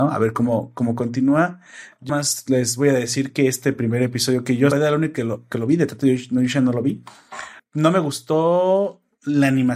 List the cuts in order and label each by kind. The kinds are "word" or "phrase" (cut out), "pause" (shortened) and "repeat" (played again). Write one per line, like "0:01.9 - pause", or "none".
0:02.1 - word
0:04.7 - phrase
0:07.6 - pause